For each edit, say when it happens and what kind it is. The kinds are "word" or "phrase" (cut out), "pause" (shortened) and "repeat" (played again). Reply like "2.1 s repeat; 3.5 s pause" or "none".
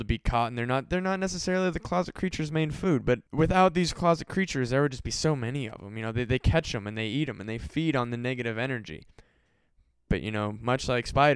3.3 s pause

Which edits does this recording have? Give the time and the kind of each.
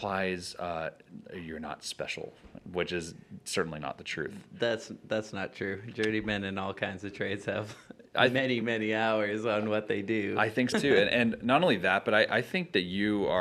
8.6 s word; 10.7 s word

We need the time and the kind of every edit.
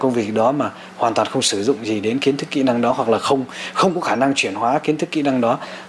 none

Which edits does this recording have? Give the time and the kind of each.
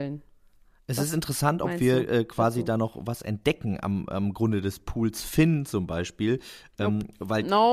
none

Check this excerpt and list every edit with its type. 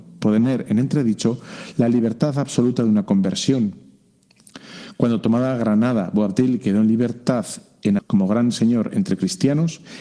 8.0 s word

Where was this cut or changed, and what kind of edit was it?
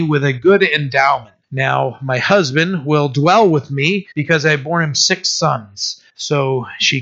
1.4 s pause; 4.1 s pause; 6.1 s pause

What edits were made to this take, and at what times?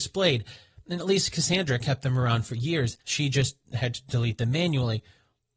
3.0 s pause

